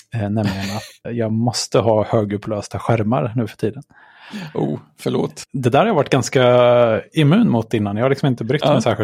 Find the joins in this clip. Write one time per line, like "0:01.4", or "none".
0:01.0